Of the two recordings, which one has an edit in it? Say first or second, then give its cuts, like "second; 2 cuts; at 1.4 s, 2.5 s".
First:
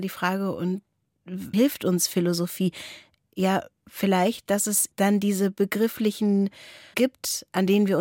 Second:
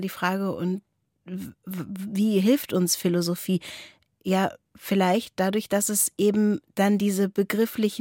first; 4 cuts; at 1.5 s, 4.5 s, 4.9 s, 6.9 s